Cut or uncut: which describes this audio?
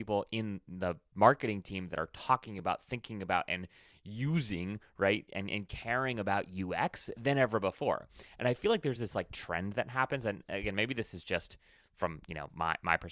uncut